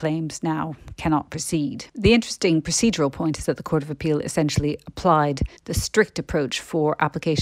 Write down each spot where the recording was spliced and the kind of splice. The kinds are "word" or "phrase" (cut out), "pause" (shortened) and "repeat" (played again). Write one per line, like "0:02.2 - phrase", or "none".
0:01.9 - pause
0:05.6 - pause